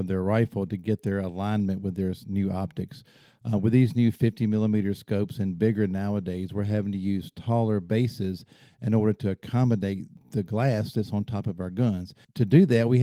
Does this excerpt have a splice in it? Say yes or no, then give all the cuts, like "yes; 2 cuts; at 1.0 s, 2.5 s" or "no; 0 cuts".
no; 0 cuts